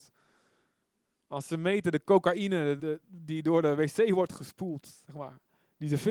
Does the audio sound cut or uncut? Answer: cut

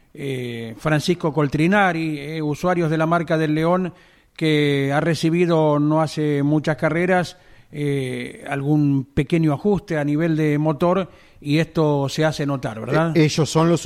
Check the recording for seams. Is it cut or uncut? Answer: uncut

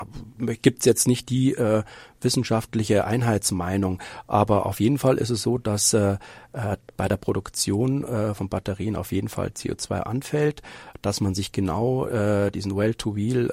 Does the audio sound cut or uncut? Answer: uncut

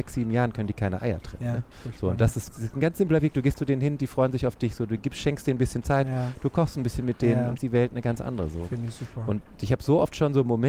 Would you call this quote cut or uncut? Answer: cut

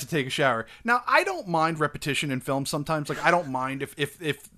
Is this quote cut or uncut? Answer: uncut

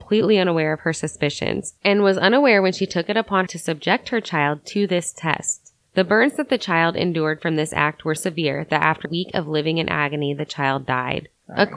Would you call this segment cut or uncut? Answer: cut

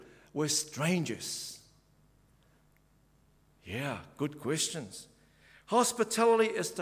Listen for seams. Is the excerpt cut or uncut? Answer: uncut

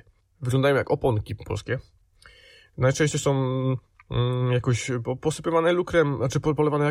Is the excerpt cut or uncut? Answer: uncut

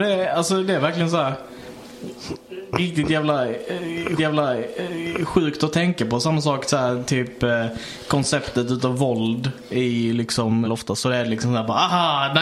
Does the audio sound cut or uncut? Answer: cut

